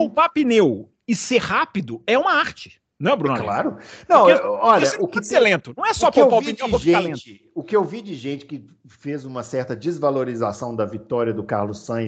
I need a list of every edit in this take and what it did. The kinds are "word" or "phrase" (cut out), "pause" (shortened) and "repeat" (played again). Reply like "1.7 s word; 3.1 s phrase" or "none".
none